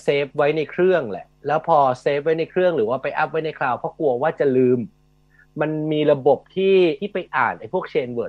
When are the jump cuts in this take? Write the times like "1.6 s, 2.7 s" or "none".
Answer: 7.0 s